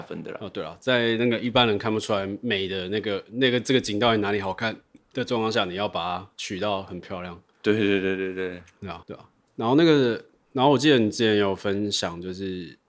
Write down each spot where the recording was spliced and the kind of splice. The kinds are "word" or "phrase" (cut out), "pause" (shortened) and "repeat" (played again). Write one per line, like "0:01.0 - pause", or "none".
0:06.3 - pause
0:09.0 - phrase